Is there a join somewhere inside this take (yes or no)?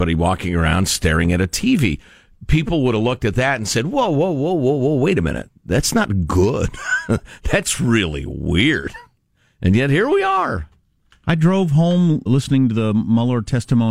yes